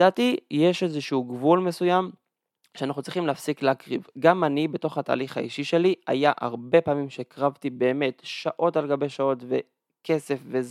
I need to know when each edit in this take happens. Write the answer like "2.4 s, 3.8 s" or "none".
none